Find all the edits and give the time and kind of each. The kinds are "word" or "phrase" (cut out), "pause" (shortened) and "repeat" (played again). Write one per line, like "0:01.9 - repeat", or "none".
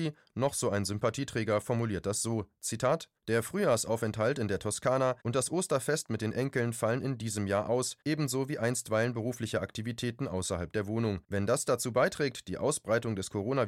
0:03.2 - pause
0:05.2 - pause
0:08.0 - pause
0:11.2 - pause

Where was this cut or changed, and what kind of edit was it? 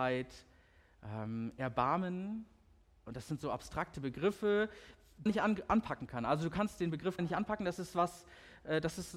0:05.3 - word
0:07.2 - word

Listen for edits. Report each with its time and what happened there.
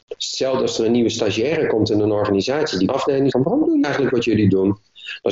0:02.9 - phrase
0:03.3 - word
0:03.8 - word

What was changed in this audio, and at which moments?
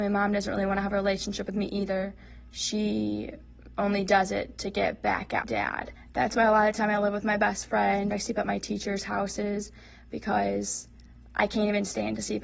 0:05.4 - word
0:08.1 - word

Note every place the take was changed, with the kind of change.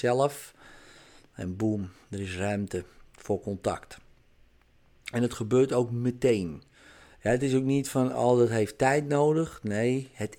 none

